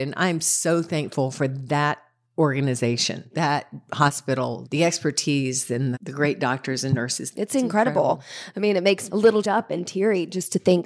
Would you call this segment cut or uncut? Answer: cut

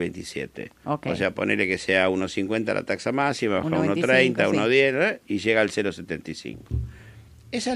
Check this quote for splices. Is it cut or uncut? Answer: uncut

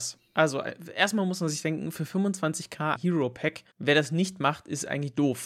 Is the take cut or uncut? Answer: cut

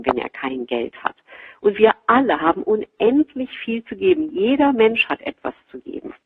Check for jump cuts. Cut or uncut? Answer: uncut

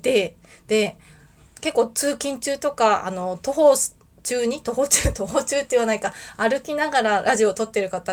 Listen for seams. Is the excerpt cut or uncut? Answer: uncut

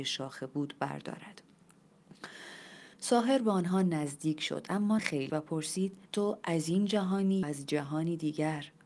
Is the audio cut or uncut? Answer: cut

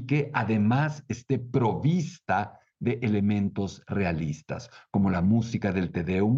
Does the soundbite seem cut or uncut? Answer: uncut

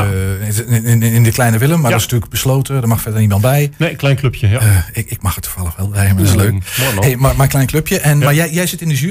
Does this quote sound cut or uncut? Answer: uncut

